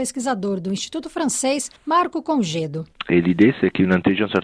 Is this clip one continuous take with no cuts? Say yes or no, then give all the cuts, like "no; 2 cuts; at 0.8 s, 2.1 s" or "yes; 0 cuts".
no; 1 cut; at 1.8 s